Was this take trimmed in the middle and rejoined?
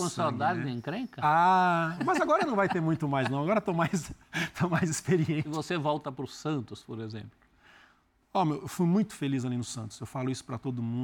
no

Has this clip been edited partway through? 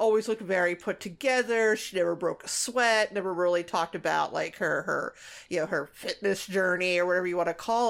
no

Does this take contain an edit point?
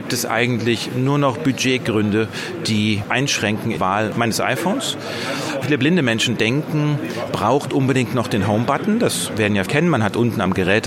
yes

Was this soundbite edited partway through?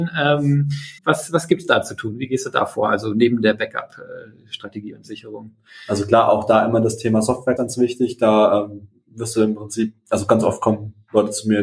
yes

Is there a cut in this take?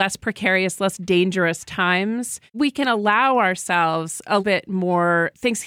yes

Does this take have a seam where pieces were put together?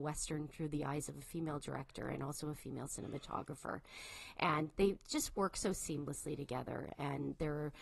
no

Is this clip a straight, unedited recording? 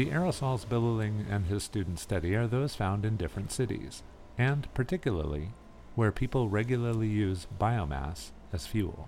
yes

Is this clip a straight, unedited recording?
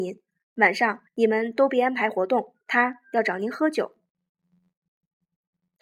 no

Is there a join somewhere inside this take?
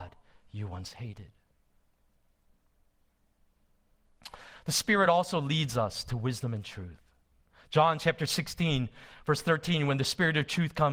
no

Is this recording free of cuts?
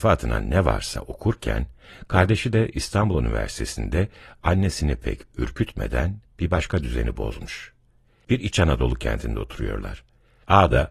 yes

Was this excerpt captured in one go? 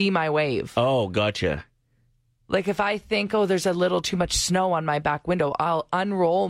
yes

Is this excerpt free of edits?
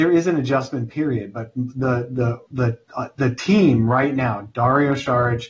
no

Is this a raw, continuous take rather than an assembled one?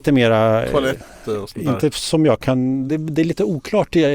yes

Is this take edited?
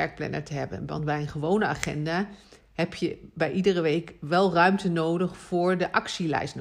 no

